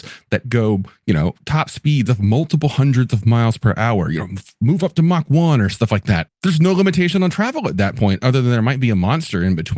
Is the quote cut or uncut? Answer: cut